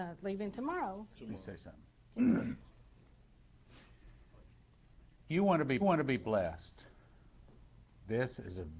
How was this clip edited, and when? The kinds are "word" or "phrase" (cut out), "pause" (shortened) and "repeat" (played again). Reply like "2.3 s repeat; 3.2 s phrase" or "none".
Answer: 5.3 s word; 5.8 s repeat